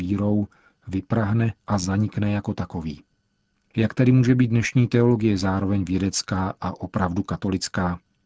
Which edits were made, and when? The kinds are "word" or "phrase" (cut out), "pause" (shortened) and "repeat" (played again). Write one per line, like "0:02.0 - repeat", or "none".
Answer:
0:01.6 - pause